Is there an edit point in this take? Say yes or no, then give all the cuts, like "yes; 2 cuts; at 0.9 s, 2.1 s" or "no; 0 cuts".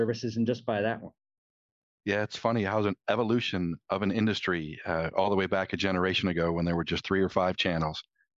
no; 0 cuts